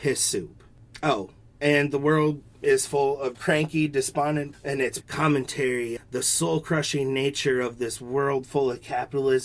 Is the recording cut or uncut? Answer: cut